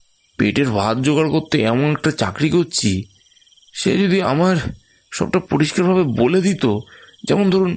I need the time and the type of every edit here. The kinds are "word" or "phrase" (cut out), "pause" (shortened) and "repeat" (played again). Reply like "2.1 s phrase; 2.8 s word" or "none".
none